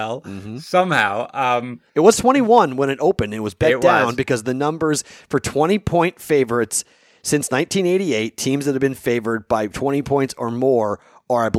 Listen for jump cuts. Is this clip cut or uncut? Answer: uncut